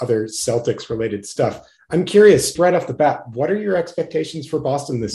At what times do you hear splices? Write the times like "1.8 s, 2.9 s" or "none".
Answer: 2.5 s